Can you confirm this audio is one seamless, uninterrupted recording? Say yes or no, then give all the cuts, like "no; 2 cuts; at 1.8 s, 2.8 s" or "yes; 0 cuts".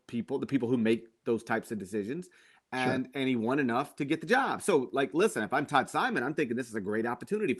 yes; 0 cuts